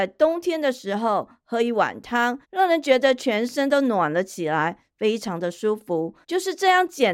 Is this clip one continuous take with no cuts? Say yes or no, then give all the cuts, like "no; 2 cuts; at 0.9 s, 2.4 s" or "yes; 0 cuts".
no; 2 cuts; at 2.4 s, 6.2 s